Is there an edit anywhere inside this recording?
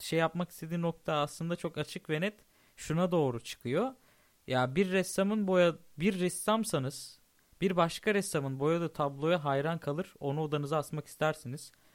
no; 0 cuts

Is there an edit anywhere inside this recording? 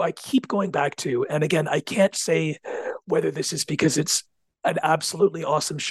no; 0 cuts

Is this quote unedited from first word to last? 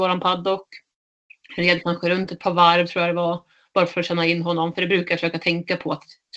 yes; 0 cuts

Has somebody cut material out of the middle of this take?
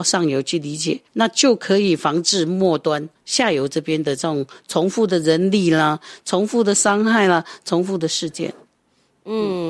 yes; 2 cuts; at 1.1 s, 3.1 s

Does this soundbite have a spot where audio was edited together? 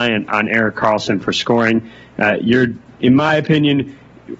no; 0 cuts

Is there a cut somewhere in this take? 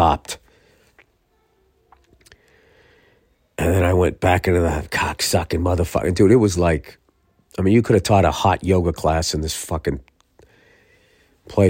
yes; 1 cut; at 6.6 s

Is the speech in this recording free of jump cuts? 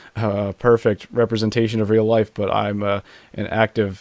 yes; 0 cuts

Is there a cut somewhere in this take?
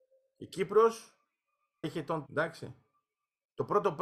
yes; 2 cuts; at 1.8 s, 2.3 s

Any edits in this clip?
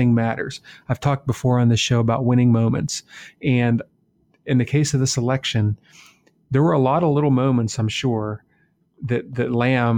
no; 0 cuts

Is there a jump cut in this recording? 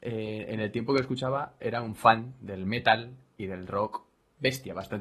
no; 0 cuts

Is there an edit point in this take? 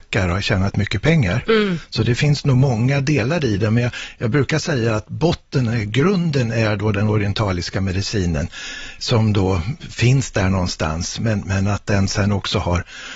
no; 0 cuts

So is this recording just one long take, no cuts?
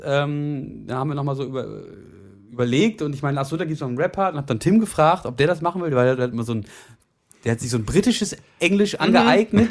yes; 0 cuts

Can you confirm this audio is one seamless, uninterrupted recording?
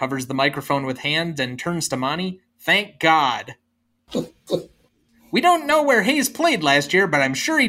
yes; 0 cuts

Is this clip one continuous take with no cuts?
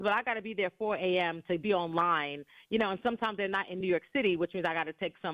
yes; 0 cuts

